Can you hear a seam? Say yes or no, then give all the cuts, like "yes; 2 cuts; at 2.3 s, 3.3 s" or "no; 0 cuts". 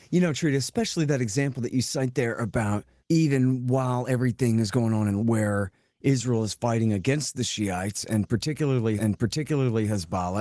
yes; 3 cuts; at 3.0 s, 5.2 s, 9.0 s